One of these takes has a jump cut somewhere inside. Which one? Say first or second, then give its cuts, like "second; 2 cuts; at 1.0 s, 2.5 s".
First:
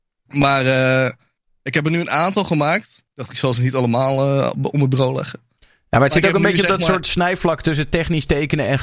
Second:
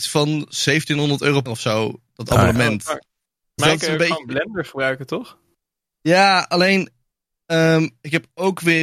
second; 2 cuts; at 1.5 s, 3.6 s